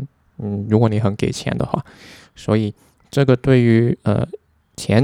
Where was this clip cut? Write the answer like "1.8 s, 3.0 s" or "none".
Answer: none